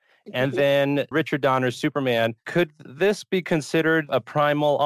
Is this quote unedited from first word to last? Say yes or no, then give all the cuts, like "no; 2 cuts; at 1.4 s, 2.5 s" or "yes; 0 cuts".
no; 1 cut; at 1.1 s